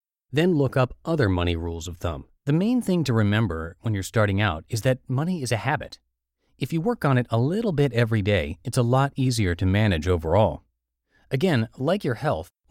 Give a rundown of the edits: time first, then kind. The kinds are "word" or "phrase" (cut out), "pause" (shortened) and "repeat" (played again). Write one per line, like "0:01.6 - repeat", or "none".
0:02.4 - pause